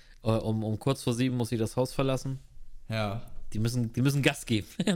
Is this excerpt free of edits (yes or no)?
yes